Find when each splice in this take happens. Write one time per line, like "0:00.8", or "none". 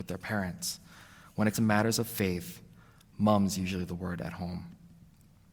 0:01.5